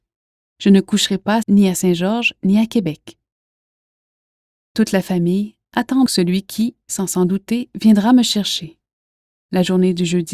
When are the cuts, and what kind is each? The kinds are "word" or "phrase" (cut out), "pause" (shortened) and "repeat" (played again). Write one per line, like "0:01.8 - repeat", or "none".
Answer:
0:01.4 - word
0:06.1 - word